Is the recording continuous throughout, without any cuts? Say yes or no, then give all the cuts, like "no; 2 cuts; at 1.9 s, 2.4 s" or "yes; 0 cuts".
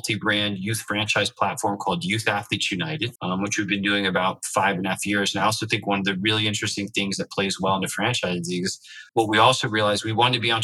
no; 2 cuts; at 3.2 s, 9.1 s